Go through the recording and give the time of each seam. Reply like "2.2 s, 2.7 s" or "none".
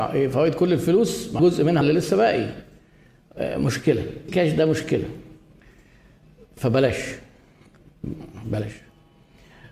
1.4 s, 1.8 s, 4.3 s